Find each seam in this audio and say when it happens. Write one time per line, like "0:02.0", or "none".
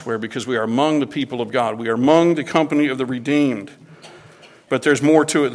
none